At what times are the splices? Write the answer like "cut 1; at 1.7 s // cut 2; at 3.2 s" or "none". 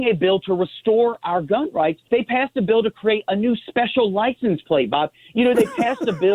cut 1; at 2.0 s